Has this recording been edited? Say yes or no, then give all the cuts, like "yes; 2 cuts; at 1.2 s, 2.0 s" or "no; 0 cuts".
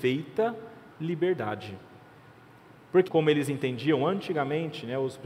yes; 2 cuts; at 0.9 s, 3.1 s